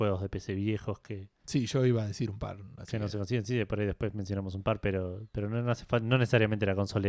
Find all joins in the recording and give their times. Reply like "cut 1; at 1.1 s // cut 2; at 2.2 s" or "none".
cut 1; at 1.4 s

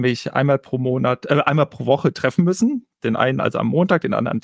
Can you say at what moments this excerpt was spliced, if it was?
none

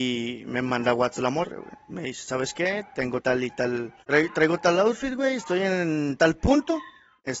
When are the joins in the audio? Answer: cut 1; at 1.9 s // cut 2; at 3.2 s // cut 3; at 4.0 s

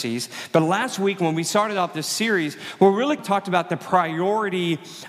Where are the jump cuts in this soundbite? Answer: cut 1; at 3.2 s

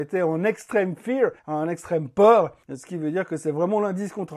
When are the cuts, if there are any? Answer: cut 1; at 1.4 s // cut 2; at 2.6 s

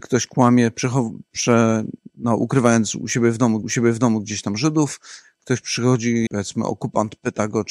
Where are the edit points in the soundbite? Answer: cut 1; at 3.6 s // cut 2; at 6.3 s

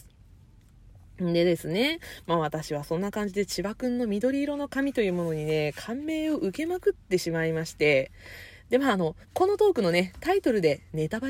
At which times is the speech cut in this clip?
cut 1; at 9.2 s

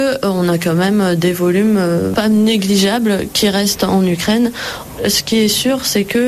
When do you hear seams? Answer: none

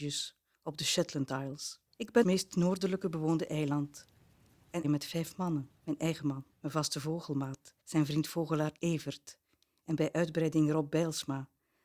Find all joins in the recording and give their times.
cut 1; at 1.9 s // cut 2; at 2.2 s // cut 3; at 4.8 s // cut 4; at 5.8 s // cut 5; at 6.5 s // cut 6; at 7.8 s

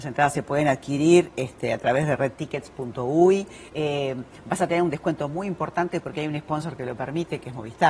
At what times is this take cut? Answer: cut 1; at 3.7 s

